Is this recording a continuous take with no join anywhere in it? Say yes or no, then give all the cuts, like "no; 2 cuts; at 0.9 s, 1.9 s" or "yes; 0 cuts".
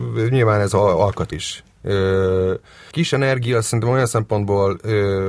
no; 2 cuts; at 1.3 s, 2.9 s